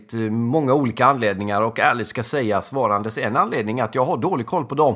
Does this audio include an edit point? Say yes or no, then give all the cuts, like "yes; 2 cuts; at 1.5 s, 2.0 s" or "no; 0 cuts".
no; 0 cuts